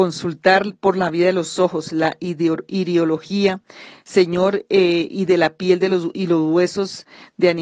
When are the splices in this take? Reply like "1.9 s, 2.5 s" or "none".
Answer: none